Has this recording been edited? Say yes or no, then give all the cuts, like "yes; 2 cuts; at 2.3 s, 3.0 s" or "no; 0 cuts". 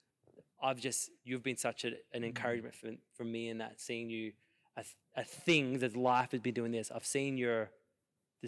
no; 0 cuts